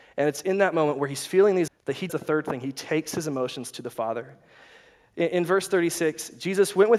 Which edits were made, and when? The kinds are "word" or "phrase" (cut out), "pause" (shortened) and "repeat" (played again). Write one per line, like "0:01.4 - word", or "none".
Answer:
0:01.7 - word
0:02.1 - word